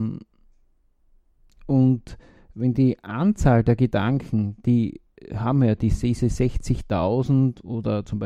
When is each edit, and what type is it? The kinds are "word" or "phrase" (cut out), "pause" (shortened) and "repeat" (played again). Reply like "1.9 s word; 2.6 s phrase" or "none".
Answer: none